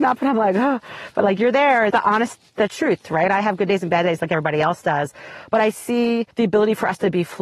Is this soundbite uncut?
no; 2 cuts; at 1.9 s, 6.3 s

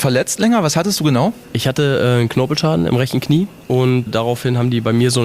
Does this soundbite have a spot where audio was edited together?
yes; 1 cut; at 4.1 s

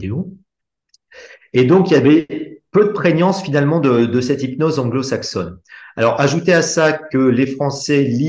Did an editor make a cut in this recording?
no; 0 cuts

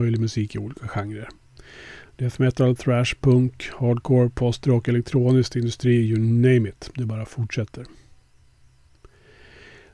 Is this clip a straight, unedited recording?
yes; 0 cuts

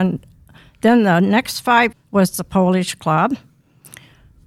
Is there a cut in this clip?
yes; 1 cut; at 1.9 s

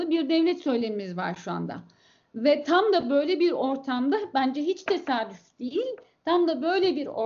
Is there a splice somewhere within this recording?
no; 0 cuts

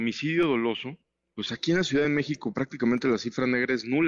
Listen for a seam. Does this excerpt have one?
no; 0 cuts

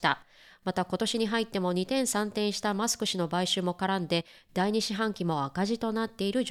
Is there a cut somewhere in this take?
no; 0 cuts

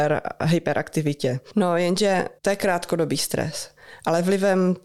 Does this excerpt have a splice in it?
yes; 1 cut; at 2.4 s

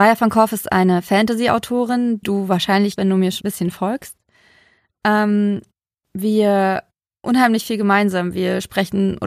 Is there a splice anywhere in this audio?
yes; 4 cuts; at 2.2 s, 3.0 s, 3.4 s, 7.2 s

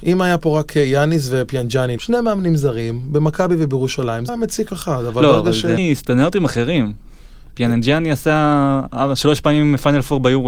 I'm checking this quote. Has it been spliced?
yes; 4 cuts; at 2.0 s, 4.3 s, 4.7 s, 5.8 s

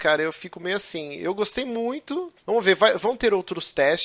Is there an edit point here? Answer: no; 0 cuts

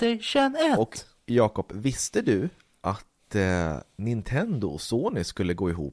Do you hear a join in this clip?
no; 0 cuts

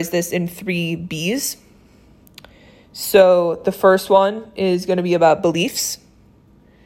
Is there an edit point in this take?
no; 0 cuts

